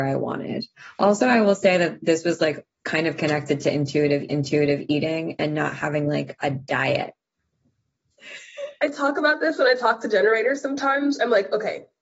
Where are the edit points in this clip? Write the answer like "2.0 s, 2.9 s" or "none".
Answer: 4.3 s